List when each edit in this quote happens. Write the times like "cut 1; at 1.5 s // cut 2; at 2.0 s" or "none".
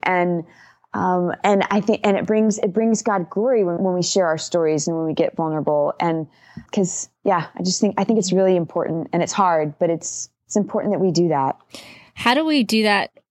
cut 1; at 3.8 s // cut 2; at 6.7 s // cut 3; at 7.2 s // cut 4; at 10.4 s